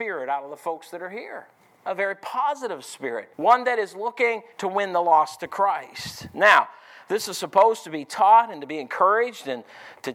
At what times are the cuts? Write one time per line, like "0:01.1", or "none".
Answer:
0:01.6
0:03.3
0:04.5